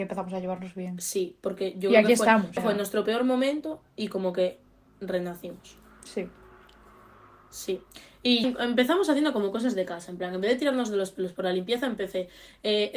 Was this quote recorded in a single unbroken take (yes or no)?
no